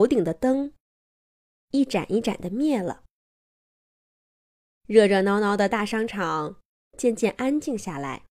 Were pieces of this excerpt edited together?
no; 0 cuts

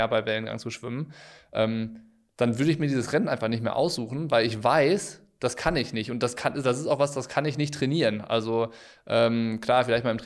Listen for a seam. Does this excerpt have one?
no; 0 cuts

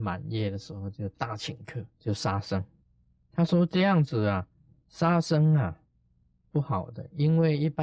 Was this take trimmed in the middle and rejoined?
yes; 2 cuts; at 1.9 s, 2.8 s

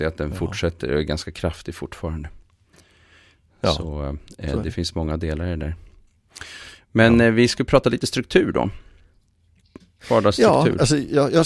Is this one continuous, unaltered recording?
yes; 0 cuts

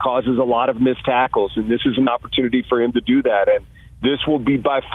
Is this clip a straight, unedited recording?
yes; 0 cuts

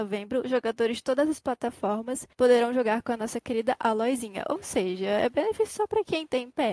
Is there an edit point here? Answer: yes; 1 cut; at 2.3 s

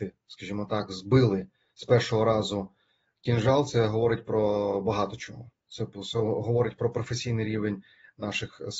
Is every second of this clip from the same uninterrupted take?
yes; 0 cuts

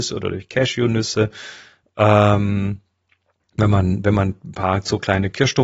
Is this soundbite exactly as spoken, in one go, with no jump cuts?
yes; 0 cuts

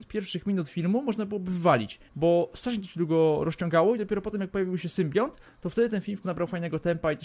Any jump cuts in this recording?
yes; 2 cuts; at 2.1 s, 6.2 s

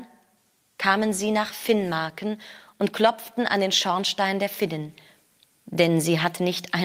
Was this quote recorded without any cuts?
yes; 0 cuts

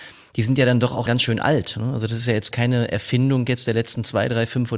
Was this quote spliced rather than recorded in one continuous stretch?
yes; 2 cuts; at 1.1 s, 2.5 s

